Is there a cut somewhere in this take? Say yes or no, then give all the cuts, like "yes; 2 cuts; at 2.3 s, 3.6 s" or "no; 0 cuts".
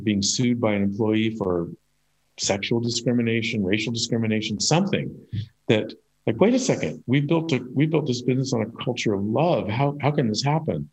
no; 0 cuts